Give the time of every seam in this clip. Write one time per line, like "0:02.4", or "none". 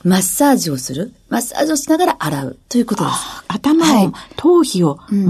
0:02.6